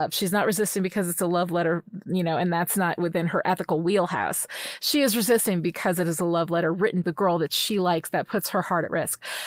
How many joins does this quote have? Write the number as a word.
one